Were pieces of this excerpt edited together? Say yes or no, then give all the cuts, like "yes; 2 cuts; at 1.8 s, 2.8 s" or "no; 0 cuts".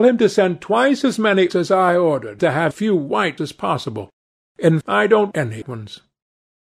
yes; 7 cuts; at 1.5 s, 2.4 s, 2.7 s, 3.4 s, 4.8 s, 5.3 s, 5.6 s